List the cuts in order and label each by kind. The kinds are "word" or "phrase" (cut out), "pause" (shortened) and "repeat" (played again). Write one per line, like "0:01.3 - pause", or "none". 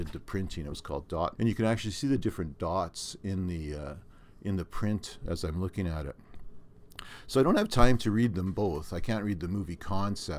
0:01.3 - word